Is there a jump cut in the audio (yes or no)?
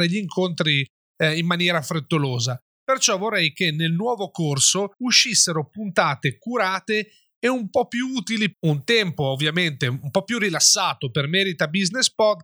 yes